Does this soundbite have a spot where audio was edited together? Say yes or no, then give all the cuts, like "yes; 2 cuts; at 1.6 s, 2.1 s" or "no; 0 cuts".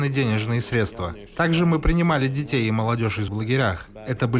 yes; 1 cut; at 3.3 s